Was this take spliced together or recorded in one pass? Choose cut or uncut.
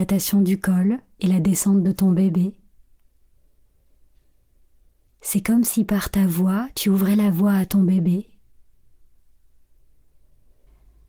uncut